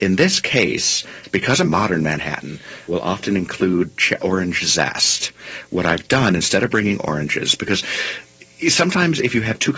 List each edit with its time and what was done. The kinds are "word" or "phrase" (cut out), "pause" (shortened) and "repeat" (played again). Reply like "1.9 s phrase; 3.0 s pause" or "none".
1.6 s word; 2.9 s word; 4.2 s word

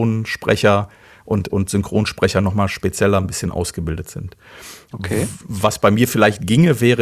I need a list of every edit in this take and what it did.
none

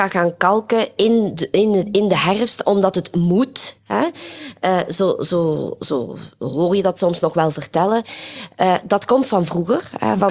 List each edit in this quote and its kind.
none

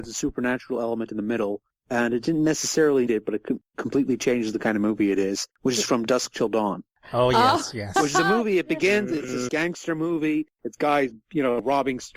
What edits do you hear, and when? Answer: 3.1 s word; 9.5 s word

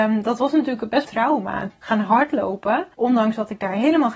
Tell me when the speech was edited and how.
1.0 s phrase; 1.7 s phrase; 2.9 s pause

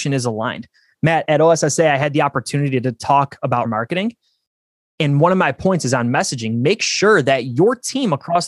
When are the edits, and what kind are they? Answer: 1.2 s word; 3.6 s word

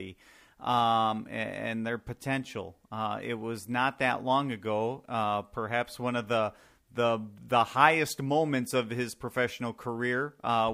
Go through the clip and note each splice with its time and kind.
none

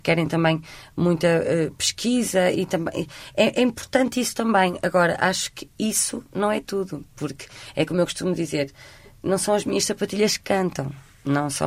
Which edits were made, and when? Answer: none

